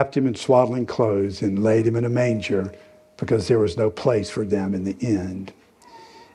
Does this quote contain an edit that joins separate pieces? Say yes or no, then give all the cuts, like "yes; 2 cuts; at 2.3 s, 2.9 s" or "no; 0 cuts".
no; 0 cuts